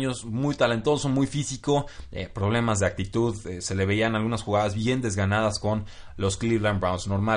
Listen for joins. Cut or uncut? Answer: uncut